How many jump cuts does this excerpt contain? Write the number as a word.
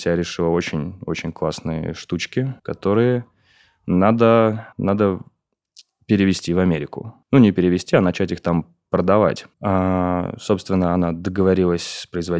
four